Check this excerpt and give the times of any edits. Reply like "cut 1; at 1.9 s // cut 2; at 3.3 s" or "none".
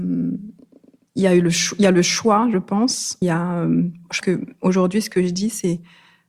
cut 1; at 3.2 s // cut 2; at 4.2 s

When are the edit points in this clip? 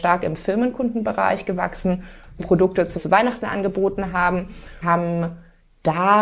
cut 1; at 2.4 s // cut 2; at 3.0 s // cut 3; at 4.8 s

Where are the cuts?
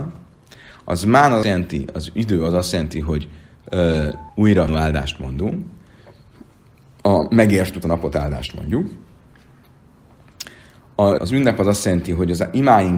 cut 1; at 1.4 s // cut 2; at 4.3 s // cut 3; at 4.7 s // cut 4; at 7.8 s // cut 5; at 11.2 s

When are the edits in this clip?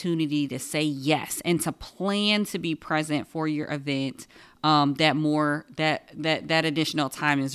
none

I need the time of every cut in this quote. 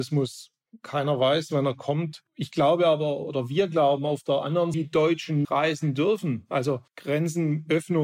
cut 1; at 4.7 s // cut 2; at 5.4 s // cut 3; at 6.9 s

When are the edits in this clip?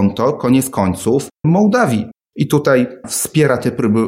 cut 1; at 1.3 s // cut 2; at 3.0 s

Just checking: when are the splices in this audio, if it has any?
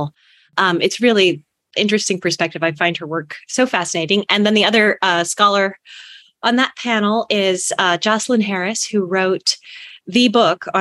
none

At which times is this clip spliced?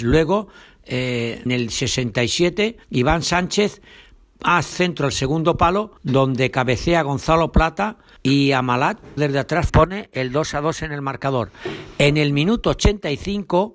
cut 1; at 1.5 s // cut 2; at 2.8 s // cut 3; at 4.7 s // cut 4; at 6.0 s // cut 5; at 8.2 s // cut 6; at 9.2 s // cut 7; at 9.7 s

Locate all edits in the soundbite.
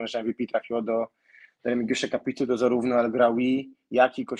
none

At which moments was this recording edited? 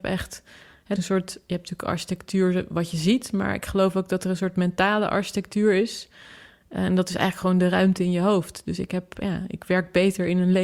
cut 1; at 1.0 s

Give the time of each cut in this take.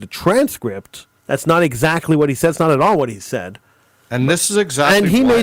cut 1; at 1.2 s

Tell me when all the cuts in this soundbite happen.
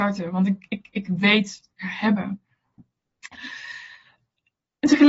cut 1; at 1.8 s

